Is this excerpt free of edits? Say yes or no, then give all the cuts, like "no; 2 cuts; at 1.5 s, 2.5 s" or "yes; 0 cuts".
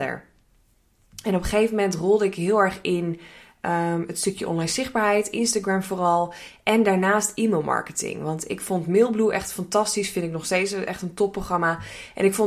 yes; 0 cuts